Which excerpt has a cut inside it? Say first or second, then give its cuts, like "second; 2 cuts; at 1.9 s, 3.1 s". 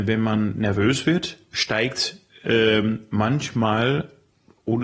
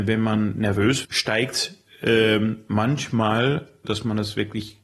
second; 2 cuts; at 1.0 s, 3.8 s